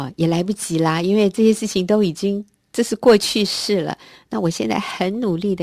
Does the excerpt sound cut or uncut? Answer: uncut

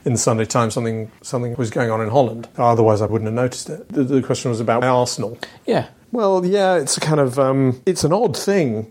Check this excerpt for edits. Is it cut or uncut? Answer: cut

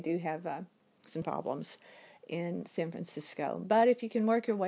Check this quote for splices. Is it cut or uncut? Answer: cut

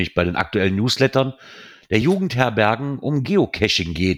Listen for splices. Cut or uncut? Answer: uncut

